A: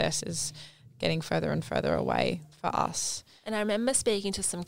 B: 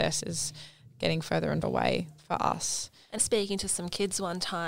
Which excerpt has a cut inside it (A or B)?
B